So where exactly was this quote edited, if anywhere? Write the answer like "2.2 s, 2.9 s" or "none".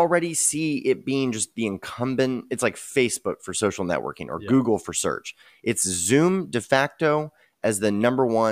none